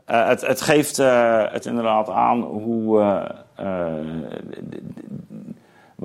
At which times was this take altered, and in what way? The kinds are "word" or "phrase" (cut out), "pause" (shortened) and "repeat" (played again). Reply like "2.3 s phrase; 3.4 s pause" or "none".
1.6 s word

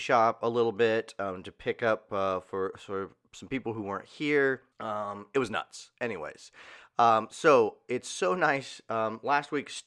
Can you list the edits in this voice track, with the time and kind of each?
4.7 s pause

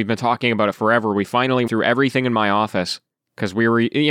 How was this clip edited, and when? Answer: 1.7 s word

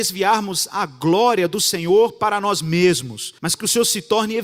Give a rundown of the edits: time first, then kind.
3.4 s pause

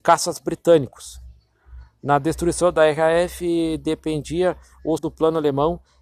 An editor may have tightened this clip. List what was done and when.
5.0 s word

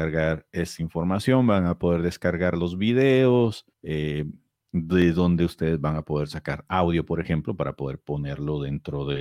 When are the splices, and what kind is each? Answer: 3.7 s pause

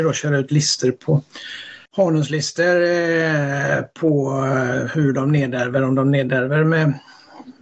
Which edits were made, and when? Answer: 1.9 s pause

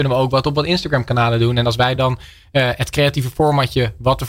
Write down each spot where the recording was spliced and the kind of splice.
none

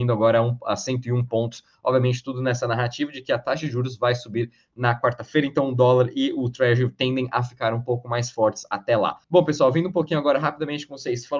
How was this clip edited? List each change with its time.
9.2 s pause

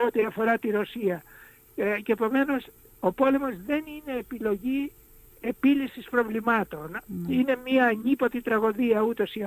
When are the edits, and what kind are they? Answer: none

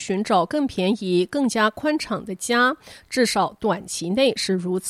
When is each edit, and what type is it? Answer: none

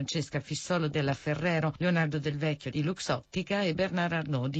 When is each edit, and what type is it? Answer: none

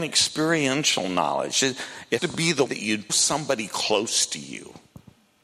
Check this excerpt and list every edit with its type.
2.2 s word; 2.7 s word; 3.1 s word

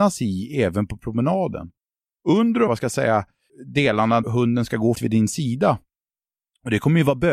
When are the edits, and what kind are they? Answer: 2.7 s word; 4.2 s word; 5.0 s word

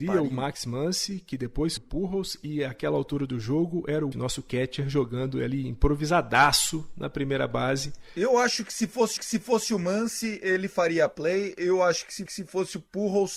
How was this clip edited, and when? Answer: 1.8 s word; 4.1 s phrase; 9.2 s repeat; 12.3 s repeat

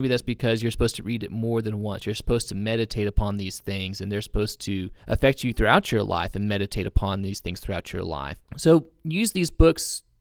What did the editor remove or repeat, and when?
5.0 s pause; 8.5 s pause

